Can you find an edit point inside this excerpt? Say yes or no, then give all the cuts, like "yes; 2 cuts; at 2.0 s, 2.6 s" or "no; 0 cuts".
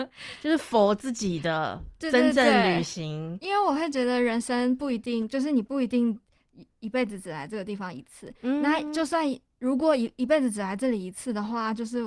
no; 0 cuts